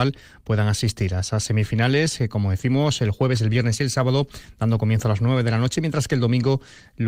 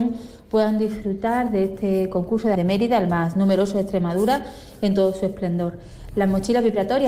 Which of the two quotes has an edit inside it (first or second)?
second